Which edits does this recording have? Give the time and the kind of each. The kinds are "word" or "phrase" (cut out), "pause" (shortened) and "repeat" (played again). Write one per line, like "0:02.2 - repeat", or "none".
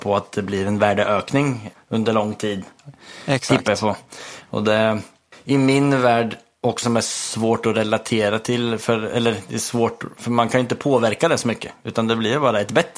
0:06.8 - word